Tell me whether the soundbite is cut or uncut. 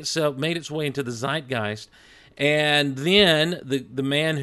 uncut